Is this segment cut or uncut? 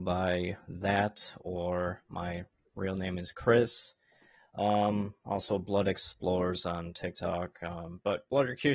uncut